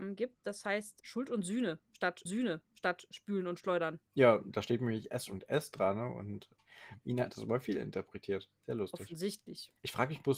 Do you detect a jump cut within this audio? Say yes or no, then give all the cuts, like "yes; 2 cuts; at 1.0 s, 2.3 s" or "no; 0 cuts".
yes; 3 cuts; at 2.3 s, 4.1 s, 8.6 s